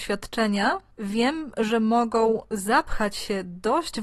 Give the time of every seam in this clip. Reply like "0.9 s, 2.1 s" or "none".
none

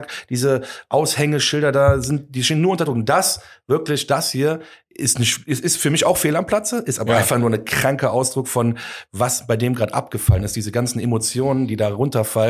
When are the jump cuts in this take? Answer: none

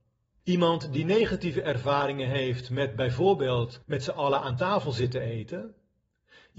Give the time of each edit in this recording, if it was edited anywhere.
3.8 s

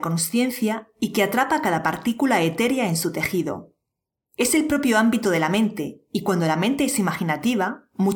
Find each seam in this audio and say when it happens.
none

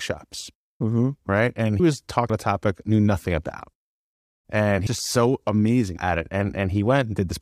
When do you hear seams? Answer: 1.8 s, 2.3 s, 2.8 s, 4.9 s

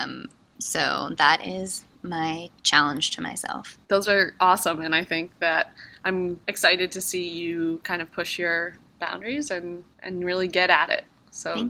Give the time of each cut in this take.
2.6 s, 3.8 s, 6.4 s, 9.9 s

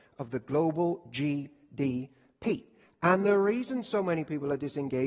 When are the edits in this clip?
none

